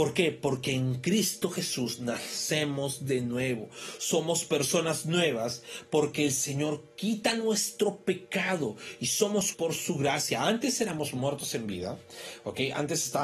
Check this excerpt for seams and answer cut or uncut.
cut